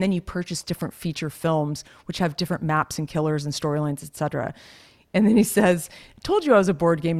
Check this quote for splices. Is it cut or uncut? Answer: uncut